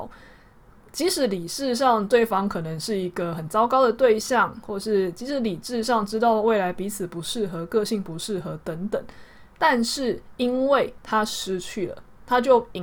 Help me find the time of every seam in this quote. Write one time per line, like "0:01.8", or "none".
none